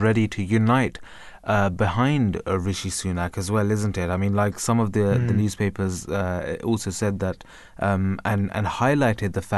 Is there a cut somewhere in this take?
no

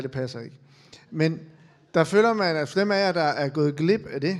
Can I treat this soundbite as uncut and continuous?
yes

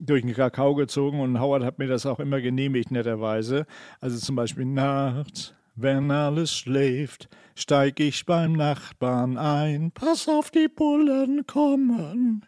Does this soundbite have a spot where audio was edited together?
no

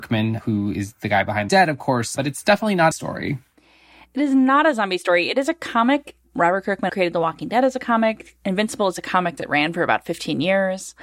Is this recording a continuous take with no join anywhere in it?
no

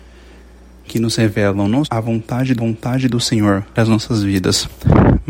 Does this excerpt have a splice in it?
yes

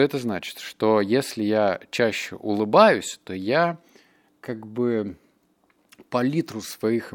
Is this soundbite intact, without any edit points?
yes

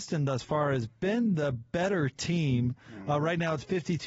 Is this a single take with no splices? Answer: yes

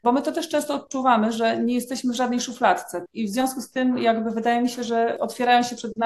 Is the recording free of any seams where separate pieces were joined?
yes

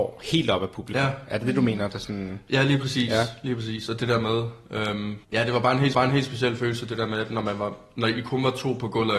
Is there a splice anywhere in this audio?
yes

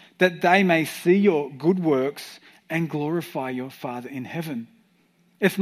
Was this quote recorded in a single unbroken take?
yes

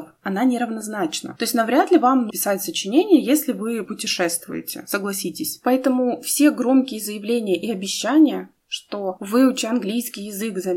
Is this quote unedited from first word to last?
no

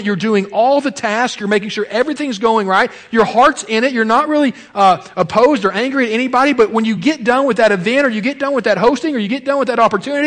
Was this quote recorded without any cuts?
yes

